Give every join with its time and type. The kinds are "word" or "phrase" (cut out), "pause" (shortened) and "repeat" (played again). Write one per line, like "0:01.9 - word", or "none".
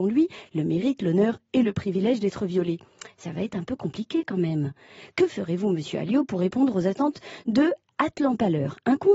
none